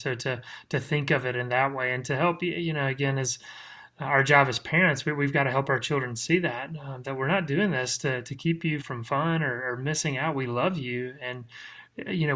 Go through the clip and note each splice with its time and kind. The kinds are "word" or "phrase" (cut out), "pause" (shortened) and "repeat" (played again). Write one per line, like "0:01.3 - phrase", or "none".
0:08.8 - word